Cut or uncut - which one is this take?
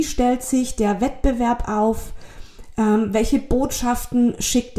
uncut